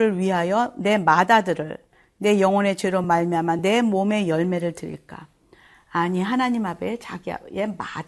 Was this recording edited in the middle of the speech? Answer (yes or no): no